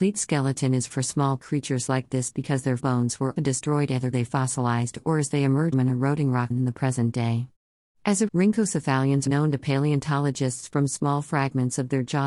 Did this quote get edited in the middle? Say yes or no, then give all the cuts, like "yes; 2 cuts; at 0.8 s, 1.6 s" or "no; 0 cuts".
yes; 9 cuts; at 0.9 s, 1.4 s, 2.8 s, 3.4 s, 4.1 s, 5.7 s, 6.5 s, 8.3 s, 9.3 s